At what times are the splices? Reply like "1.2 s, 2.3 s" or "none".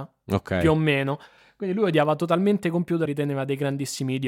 3.1 s